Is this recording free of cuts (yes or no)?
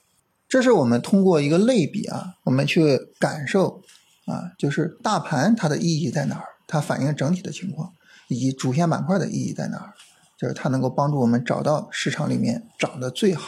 yes